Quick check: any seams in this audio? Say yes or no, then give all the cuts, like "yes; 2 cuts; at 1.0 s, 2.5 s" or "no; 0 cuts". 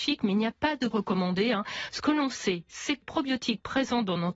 yes; 2 cuts; at 0.9 s, 3.0 s